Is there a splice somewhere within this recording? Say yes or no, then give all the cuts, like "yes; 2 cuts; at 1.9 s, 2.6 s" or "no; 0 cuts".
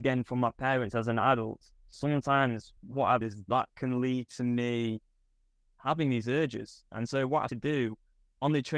yes; 3 cuts; at 2.8 s, 3.2 s, 7.5 s